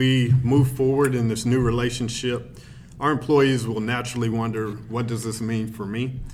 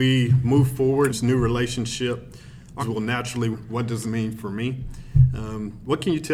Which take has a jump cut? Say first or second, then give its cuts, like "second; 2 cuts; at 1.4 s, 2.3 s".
second; 4 cuts; at 1.1 s, 2.8 s, 3.5 s, 4.0 s